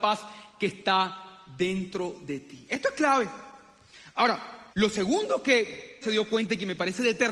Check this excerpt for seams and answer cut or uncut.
cut